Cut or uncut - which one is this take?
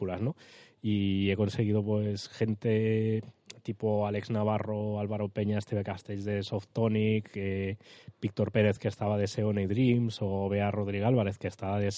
uncut